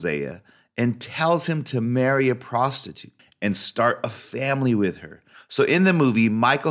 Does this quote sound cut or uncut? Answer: uncut